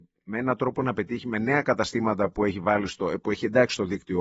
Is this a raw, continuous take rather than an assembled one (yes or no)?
yes